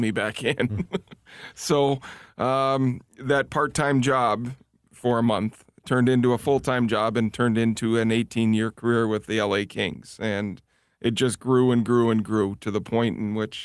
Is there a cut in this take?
no; 0 cuts

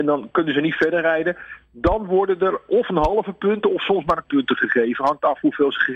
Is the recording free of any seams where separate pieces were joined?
no; 1 cut; at 4.2 s

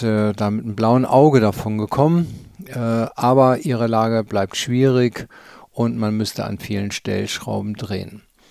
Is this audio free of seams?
yes; 0 cuts

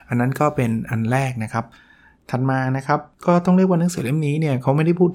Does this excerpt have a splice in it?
yes; 1 cut; at 3.1 s

